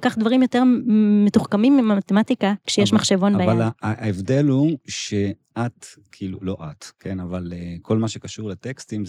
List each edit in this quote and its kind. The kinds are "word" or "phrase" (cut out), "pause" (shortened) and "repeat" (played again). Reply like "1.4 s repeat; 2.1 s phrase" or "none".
none

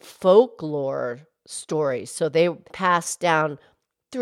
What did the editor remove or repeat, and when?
2.7 s word

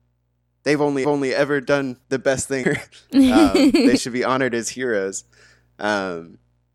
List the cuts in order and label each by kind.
1.0 s repeat; 2.0 s pause; 2.6 s word; 4.0 s phrase

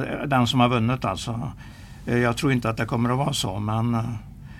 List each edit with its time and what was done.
none

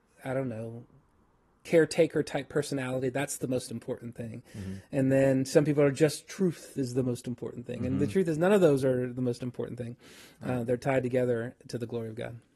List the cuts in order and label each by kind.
none

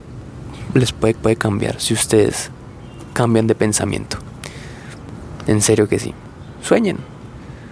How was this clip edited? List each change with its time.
1.1 s repeat

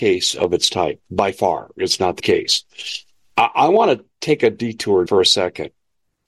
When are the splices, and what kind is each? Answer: 2.2 s word; 5.1 s word

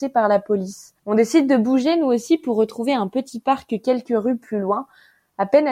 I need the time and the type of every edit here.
1.0 s pause

